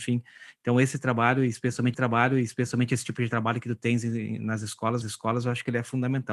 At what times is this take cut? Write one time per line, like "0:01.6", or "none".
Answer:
0:01.9
0:05.0